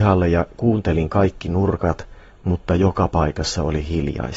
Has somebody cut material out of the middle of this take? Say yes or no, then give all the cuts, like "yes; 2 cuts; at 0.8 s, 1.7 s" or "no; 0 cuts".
no; 0 cuts